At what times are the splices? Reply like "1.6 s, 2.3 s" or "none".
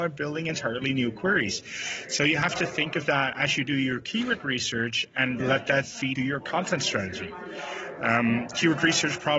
5.4 s, 6.2 s